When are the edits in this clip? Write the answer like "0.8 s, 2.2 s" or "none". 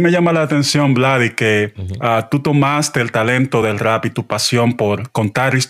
none